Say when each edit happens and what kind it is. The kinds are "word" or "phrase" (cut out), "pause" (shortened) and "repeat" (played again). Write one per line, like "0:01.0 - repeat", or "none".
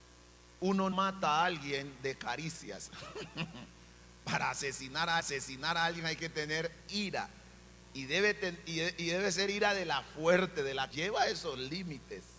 0:00.9 - word
0:05.2 - repeat
0:06.8 - pause
0:10.9 - word